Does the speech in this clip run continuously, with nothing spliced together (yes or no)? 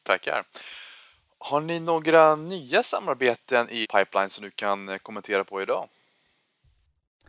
no